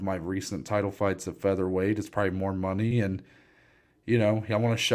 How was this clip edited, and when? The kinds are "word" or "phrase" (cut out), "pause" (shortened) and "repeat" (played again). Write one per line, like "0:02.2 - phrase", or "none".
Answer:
none